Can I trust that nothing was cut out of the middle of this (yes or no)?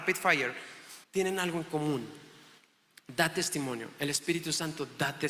no